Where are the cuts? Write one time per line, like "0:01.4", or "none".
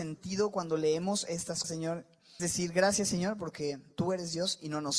0:01.6
0:02.4